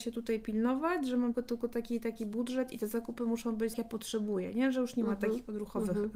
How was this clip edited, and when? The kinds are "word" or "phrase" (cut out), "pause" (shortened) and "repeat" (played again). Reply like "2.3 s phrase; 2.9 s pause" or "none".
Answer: 1.3 s word; 3.7 s phrase